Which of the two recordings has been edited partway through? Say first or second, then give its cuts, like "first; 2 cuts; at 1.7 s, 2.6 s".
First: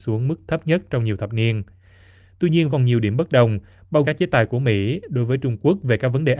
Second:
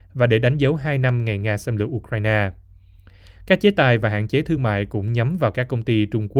first; 2 cuts; at 2.7 s, 4.0 s